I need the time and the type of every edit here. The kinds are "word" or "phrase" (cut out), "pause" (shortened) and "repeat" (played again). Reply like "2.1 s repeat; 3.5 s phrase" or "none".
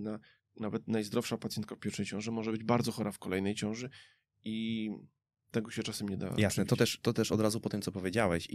none